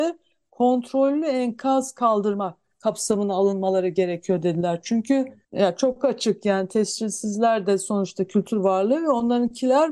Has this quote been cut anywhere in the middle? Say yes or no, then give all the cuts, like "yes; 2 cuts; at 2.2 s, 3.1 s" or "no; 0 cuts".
yes; 1 cut; at 5.4 s